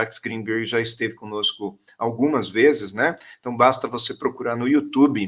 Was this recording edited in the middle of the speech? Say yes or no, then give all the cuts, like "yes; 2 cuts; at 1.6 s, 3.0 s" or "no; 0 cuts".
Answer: no; 0 cuts